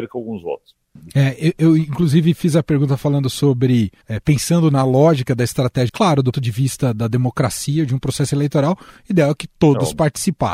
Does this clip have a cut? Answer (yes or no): yes